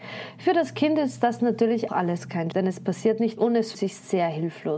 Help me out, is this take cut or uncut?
cut